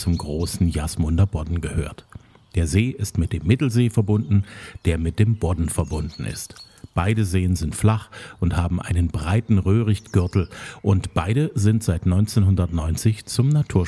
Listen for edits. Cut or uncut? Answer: uncut